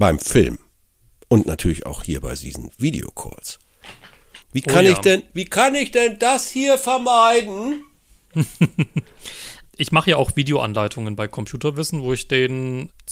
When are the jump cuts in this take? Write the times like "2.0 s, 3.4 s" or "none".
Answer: 4.4 s, 9.7 s